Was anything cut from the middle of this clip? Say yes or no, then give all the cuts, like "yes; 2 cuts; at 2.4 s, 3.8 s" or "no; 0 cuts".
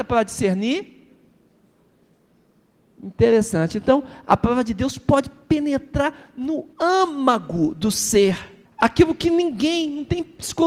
yes; 2 cuts; at 6.7 s, 8.6 s